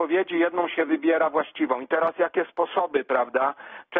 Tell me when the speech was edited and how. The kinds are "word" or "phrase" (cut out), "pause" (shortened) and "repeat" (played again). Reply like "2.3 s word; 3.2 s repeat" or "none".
2.5 s word